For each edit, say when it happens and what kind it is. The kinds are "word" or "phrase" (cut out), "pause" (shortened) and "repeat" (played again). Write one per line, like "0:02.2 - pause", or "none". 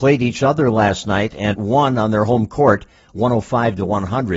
0:01.5 - word